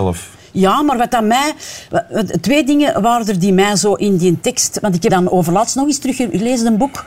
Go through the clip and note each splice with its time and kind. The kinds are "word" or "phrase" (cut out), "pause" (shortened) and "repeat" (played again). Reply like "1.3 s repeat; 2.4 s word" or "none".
5.1 s word

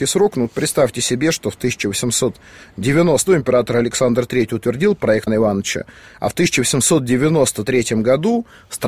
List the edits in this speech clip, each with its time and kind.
3.3 s word; 5.3 s word

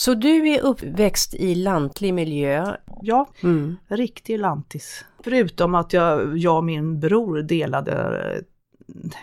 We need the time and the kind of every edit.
3.3 s pause

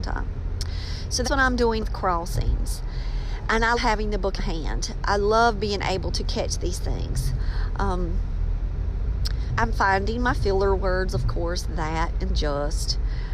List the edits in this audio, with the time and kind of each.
1.2 s word; 1.8 s word; 3.8 s word; 4.4 s phrase; 9.5 s word

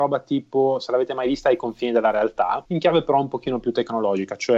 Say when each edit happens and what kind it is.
2.7 s pause

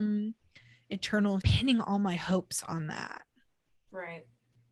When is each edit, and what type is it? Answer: 1.4 s phrase

